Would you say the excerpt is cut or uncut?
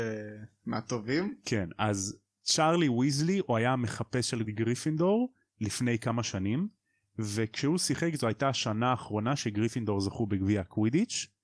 cut